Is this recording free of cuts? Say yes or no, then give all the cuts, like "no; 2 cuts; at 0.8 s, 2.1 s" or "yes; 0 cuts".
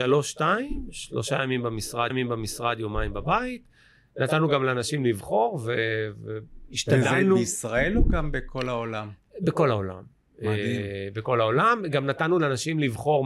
no; 1 cut; at 2.1 s